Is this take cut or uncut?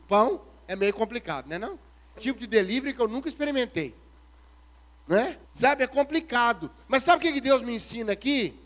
cut